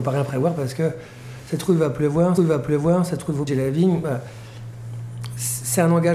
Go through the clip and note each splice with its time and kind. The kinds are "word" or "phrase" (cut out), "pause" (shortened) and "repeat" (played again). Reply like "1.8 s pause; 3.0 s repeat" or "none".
2.4 s repeat; 3.5 s word